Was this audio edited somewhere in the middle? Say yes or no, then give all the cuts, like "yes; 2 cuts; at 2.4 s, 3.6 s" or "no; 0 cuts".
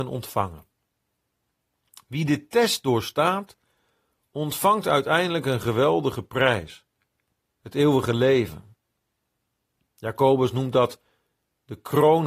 no; 0 cuts